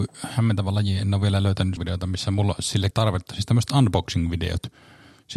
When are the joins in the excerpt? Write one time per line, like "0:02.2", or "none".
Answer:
0:01.8
0:02.9